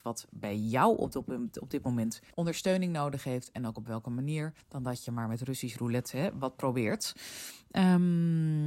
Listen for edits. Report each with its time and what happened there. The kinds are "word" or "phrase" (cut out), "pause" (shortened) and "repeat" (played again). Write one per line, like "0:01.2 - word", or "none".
0:02.3 - pause
0:04.6 - pause